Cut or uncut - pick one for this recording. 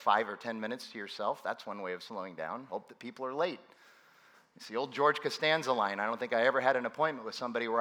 uncut